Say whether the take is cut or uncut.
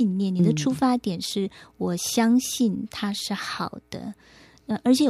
uncut